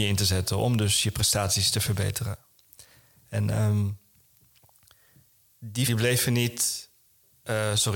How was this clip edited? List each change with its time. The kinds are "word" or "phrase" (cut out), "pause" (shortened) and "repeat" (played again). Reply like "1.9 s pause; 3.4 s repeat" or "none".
5.9 s word

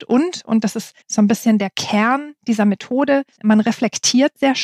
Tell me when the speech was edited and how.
1.0 s pause; 3.3 s pause

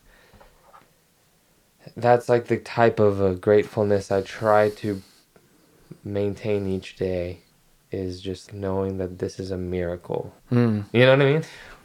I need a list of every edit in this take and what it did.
8.5 s word; 10.4 s pause

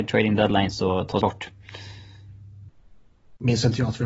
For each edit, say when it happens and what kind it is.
1.2 s word

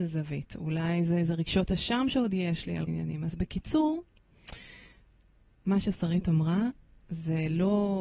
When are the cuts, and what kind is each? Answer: 2.9 s phrase

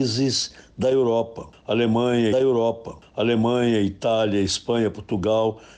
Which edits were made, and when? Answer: 2.3 s repeat

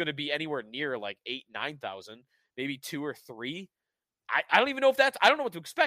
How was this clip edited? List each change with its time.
none

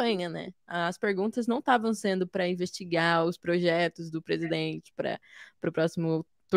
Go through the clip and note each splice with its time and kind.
none

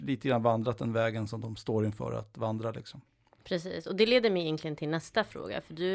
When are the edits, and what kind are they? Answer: none

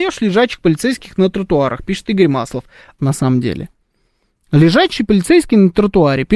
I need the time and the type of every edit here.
3.0 s phrase

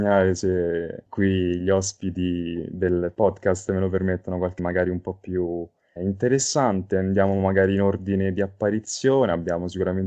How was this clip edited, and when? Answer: 4.6 s word; 6.0 s word

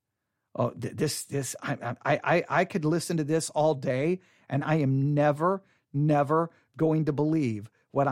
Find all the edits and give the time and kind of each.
none

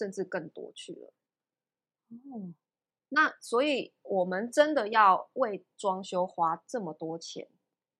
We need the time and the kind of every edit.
none

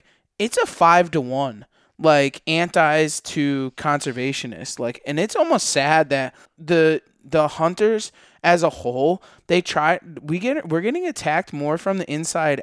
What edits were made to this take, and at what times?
6.4 s word

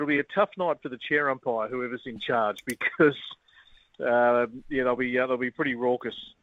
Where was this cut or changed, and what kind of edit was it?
none

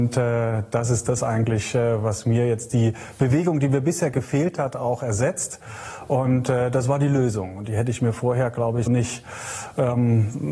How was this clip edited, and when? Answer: 8.9 s word

